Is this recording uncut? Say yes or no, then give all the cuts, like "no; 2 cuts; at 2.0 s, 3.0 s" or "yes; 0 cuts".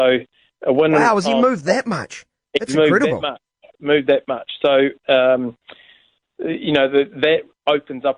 yes; 0 cuts